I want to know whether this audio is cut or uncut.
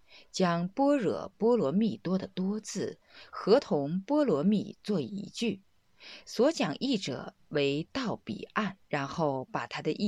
cut